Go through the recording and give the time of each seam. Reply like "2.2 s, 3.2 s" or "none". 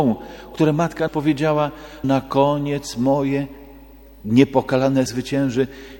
1.1 s, 2.0 s, 5.1 s